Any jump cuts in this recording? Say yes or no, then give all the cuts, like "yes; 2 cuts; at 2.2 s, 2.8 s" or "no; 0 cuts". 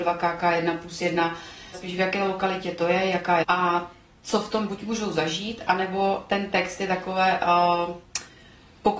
yes; 3 cuts; at 1.7 s, 3.4 s, 4.7 s